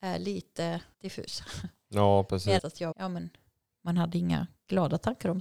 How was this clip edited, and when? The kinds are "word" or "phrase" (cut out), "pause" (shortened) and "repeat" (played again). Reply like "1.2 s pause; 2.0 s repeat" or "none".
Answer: 0.9 s pause; 2.6 s phrase; 2.9 s word